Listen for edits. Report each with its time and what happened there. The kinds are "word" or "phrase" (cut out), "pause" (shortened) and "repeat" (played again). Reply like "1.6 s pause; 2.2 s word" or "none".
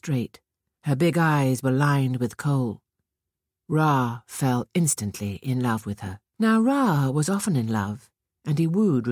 6.3 s pause